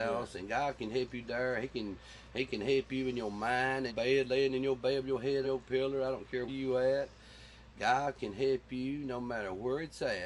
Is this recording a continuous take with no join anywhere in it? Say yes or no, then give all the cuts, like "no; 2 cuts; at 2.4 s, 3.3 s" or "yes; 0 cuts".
no; 3 cuts; at 3.9 s, 5.4 s, 6.5 s